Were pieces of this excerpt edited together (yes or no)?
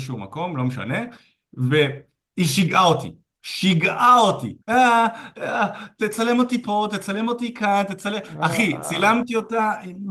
yes